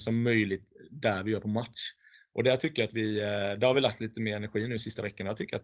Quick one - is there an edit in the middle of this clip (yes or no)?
no